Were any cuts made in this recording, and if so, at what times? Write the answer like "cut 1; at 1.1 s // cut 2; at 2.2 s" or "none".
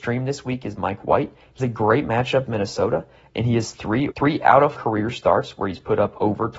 cut 1; at 1.6 s // cut 2; at 2.5 s // cut 3; at 4.1 s // cut 4; at 4.7 s